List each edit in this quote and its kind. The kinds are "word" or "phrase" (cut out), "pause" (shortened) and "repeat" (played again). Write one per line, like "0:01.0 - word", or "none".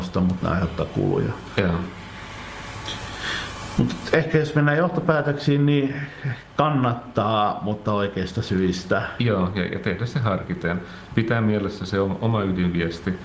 none